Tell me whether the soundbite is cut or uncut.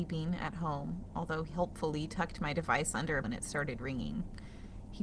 cut